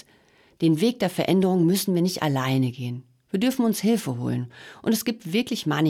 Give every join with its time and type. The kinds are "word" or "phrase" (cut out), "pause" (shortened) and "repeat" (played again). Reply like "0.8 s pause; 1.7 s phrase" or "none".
none

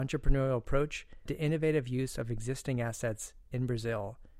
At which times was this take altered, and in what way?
1.3 s word

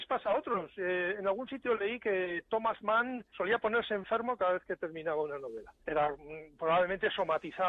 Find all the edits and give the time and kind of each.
3.3 s pause; 5.8 s pause

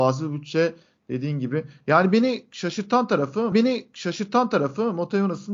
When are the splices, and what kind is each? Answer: 3.5 s repeat

